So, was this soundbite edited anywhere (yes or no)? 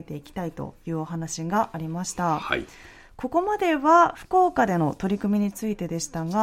no